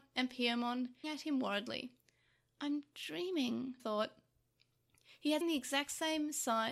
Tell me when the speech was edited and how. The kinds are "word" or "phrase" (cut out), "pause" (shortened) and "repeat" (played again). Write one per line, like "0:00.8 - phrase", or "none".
0:01.0 - word
0:03.8 - word
0:05.4 - word